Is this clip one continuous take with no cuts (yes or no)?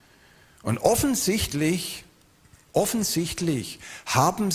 yes